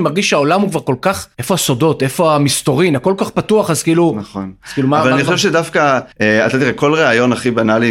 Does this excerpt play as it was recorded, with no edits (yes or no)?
no